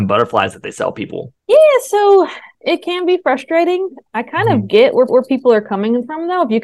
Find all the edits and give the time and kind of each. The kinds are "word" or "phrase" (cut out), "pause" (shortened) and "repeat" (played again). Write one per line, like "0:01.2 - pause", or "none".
0:01.4 - pause
0:02.5 - pause
0:05.1 - repeat